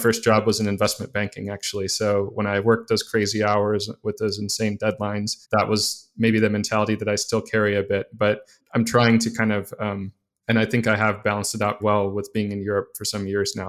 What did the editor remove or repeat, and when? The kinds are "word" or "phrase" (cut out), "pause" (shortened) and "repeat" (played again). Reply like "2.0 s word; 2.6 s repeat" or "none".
5.4 s pause; 11.8 s word